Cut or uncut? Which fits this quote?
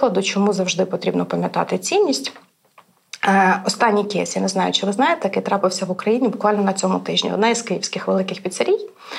uncut